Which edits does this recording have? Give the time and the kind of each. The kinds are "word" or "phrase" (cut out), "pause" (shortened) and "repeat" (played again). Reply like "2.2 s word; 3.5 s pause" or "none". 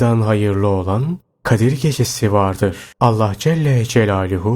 2.9 s pause